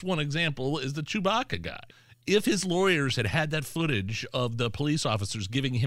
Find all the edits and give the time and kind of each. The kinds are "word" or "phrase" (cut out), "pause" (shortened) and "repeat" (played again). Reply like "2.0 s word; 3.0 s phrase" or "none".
1.9 s pause